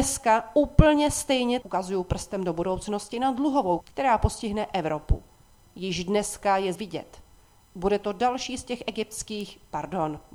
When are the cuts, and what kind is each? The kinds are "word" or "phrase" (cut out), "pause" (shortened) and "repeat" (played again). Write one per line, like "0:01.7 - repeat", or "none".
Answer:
0:01.6 - word
0:03.8 - word
0:06.8 - word